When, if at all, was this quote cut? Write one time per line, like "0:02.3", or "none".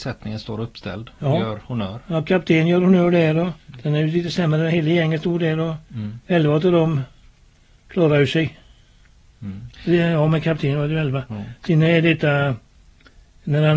0:03.6
0:05.8